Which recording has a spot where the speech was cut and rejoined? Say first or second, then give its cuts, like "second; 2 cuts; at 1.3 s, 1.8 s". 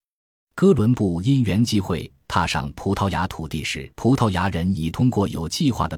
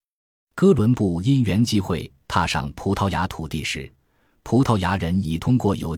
first; 1 cut; at 3.9 s